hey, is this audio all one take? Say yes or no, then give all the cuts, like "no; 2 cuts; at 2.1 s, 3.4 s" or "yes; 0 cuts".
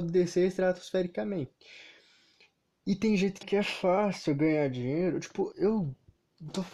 no; 2 cuts; at 3.4 s, 5.5 s